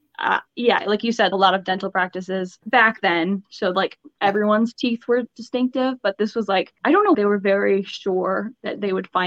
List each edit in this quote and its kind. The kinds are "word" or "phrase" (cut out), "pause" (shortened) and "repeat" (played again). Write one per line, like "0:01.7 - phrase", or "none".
0:01.3 - phrase
0:02.6 - pause
0:06.8 - pause
0:07.1 - phrase